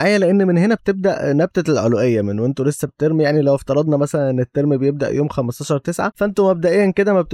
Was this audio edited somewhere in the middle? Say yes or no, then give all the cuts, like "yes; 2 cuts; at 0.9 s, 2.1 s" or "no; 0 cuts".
yes; 1 cut; at 2.9 s